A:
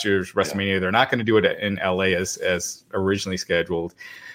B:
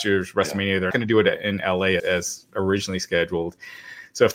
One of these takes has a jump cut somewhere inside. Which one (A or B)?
B